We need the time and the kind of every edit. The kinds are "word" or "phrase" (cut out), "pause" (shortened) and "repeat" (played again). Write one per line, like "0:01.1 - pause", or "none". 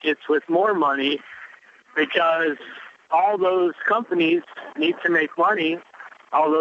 none